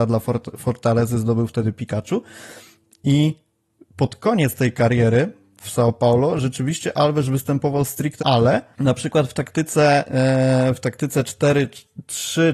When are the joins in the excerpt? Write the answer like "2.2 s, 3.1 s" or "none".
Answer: 8.2 s, 8.7 s